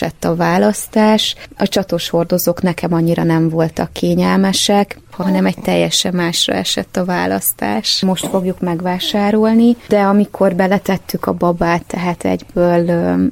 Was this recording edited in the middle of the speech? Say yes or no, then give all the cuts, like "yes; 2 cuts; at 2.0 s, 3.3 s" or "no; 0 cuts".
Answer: no; 0 cuts